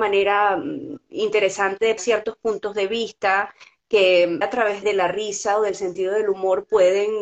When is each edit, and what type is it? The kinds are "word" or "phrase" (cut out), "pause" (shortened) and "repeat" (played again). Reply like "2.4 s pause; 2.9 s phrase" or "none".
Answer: 2.0 s word; 4.4 s word; 4.8 s word